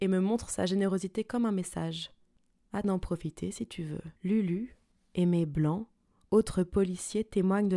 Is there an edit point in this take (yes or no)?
yes